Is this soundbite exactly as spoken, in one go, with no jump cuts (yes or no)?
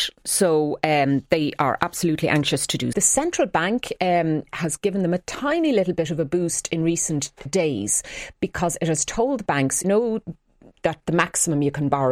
no